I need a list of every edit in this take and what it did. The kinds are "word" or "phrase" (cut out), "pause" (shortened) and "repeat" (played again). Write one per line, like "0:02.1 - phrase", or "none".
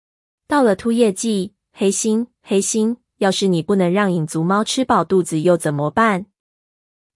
0:02.4 - repeat